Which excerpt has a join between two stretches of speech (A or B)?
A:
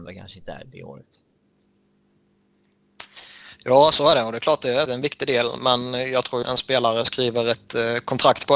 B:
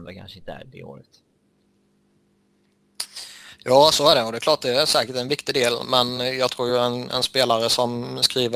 A